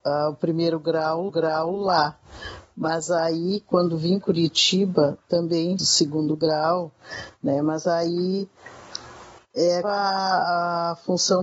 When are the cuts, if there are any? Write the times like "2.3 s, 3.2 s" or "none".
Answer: 1.3 s, 4.2 s, 5.8 s, 9.8 s